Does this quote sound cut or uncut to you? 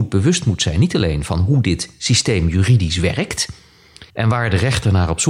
cut